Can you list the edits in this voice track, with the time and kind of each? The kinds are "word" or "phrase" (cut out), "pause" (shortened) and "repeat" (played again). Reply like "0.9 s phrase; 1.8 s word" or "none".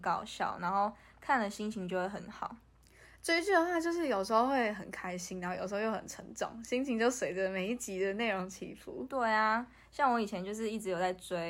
none